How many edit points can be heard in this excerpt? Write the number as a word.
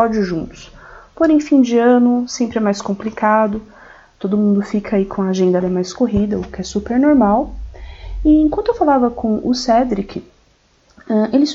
one